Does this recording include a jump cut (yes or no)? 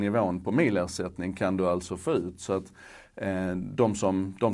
no